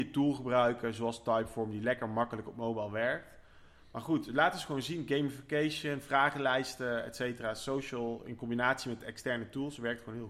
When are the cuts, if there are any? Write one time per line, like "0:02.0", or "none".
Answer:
none